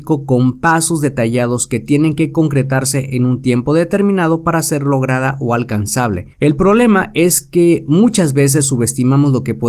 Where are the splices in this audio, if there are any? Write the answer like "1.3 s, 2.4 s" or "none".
6.3 s